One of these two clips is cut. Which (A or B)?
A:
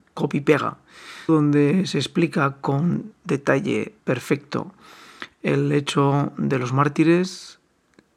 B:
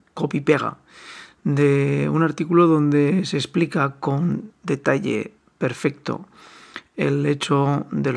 A